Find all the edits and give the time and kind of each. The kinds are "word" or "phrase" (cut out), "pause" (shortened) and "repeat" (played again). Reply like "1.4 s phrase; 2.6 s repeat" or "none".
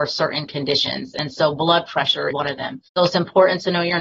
2.3 s phrase; 2.9 s pause